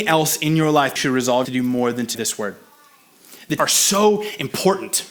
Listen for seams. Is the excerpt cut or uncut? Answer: cut